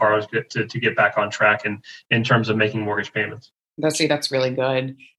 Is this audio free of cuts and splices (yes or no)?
yes